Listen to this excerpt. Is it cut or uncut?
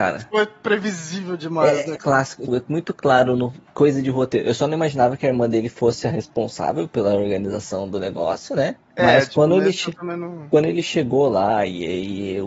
cut